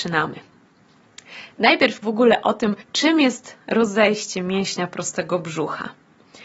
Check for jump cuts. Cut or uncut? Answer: cut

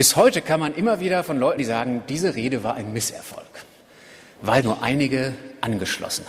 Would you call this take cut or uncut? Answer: cut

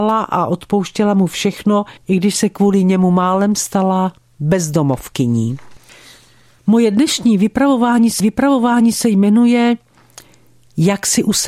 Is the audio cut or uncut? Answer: cut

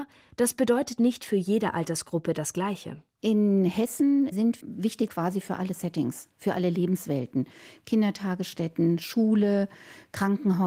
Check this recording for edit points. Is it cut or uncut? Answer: cut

